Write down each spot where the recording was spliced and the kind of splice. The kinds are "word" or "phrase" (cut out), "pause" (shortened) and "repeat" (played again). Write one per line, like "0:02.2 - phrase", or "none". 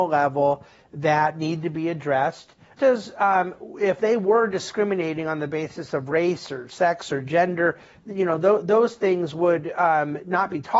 0:02.8 - word

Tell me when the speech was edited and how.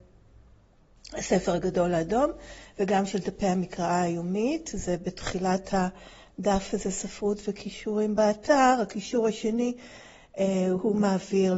none

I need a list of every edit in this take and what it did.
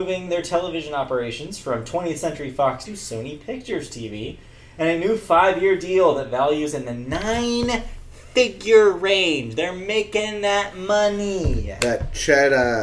0:02.8 - word

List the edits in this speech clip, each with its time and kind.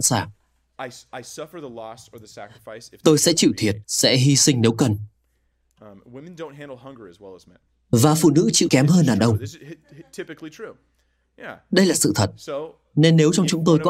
0:03.8 - pause
0:08.7 - word

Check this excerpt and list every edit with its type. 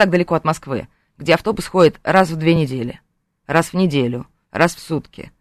none

